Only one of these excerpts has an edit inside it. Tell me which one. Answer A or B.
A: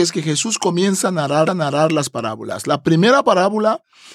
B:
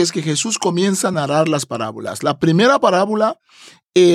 A